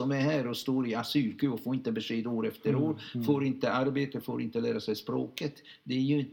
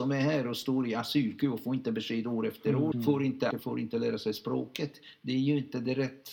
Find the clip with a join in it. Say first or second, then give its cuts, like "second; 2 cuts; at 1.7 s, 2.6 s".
second; 2 cuts; at 2.9 s, 3.5 s